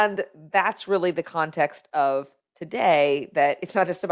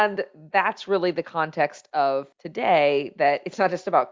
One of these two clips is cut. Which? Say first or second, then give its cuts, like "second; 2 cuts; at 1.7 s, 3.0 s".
second; 1 cut; at 2.3 s